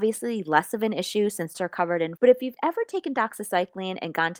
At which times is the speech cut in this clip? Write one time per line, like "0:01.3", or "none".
0:01.5
0:02.2